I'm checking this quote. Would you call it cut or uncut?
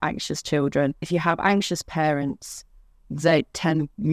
cut